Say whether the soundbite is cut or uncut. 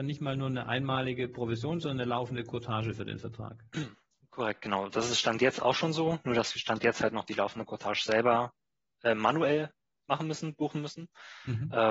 uncut